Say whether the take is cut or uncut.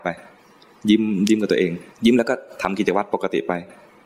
cut